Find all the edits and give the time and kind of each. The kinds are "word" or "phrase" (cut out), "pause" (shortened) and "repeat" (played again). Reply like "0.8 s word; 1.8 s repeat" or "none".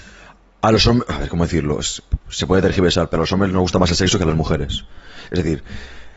none